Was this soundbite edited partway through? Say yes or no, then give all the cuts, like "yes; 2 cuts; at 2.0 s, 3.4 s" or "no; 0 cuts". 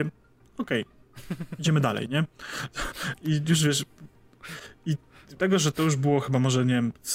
yes; 1 cut; at 5.4 s